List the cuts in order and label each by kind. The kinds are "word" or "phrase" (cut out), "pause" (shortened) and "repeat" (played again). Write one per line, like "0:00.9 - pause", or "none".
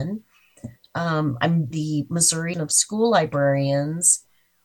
0:01.7 - phrase
0:02.5 - word